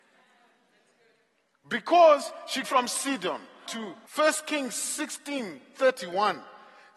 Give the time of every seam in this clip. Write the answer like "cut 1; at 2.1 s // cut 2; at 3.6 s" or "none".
cut 1; at 2.6 s // cut 2; at 3.7 s // cut 3; at 4.0 s